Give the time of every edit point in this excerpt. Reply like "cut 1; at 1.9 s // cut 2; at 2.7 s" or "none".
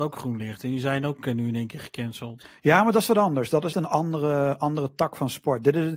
cut 1; at 3.7 s